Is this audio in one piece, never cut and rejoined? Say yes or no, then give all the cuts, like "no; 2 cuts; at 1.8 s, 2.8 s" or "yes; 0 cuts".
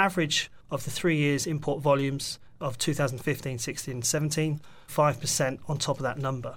no; 1 cut; at 4.9 s